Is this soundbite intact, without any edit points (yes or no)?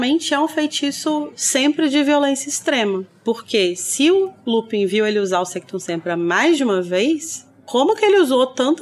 yes